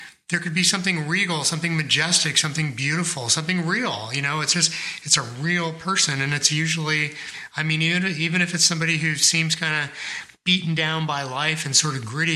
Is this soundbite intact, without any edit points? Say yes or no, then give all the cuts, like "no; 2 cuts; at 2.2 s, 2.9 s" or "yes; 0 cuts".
yes; 0 cuts